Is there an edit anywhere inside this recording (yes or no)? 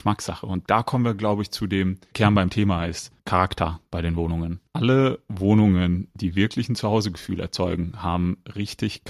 no